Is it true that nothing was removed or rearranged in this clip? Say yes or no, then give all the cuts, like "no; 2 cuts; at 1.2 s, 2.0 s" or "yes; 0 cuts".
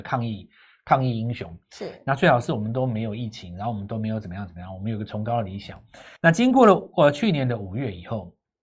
no; 1 cut; at 6.2 s